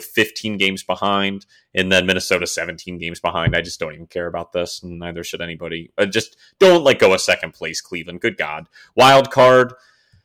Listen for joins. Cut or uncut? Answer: uncut